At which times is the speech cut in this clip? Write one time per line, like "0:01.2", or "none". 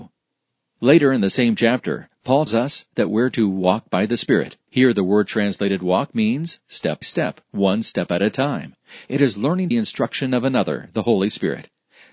0:02.5
0:04.6
0:07.0
0:09.7